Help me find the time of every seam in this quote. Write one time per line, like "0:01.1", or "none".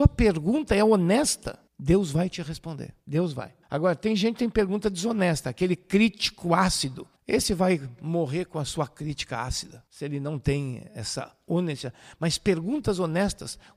0:01.7
0:03.0
0:03.6
0:07.2
0:09.9